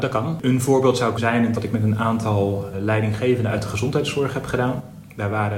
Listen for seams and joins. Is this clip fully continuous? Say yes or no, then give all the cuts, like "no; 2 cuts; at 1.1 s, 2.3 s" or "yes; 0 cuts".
no; 3 cuts; at 1.2 s, 1.5 s, 2.7 s